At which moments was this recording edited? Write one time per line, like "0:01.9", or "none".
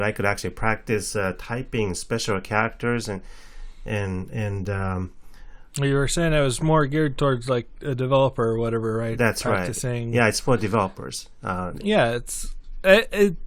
none